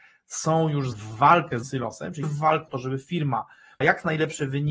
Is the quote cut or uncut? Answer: cut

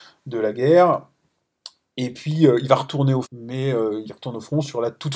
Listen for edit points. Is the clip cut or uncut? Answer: cut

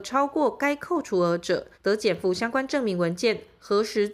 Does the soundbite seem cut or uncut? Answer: cut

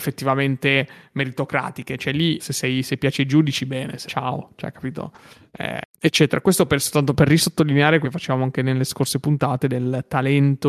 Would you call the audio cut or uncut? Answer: cut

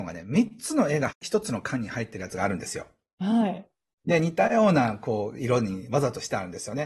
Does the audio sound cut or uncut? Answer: uncut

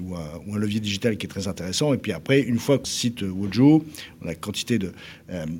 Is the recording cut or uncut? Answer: cut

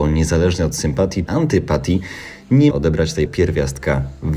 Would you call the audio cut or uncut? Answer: cut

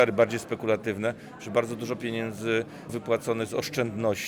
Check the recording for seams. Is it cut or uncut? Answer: cut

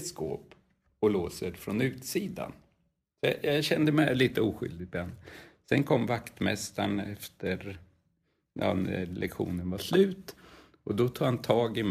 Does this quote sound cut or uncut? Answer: uncut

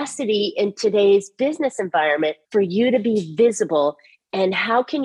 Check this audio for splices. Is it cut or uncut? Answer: cut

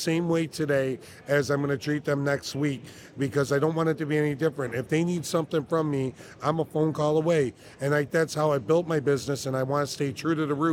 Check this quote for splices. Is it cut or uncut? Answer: cut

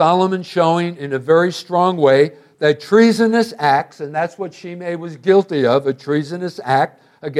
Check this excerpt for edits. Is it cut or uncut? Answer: uncut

